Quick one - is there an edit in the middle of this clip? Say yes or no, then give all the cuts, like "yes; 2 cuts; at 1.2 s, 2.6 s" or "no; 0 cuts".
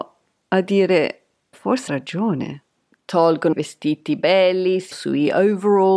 yes; 5 cuts; at 1.5 s, 1.9 s, 3.5 s, 4.2 s, 4.9 s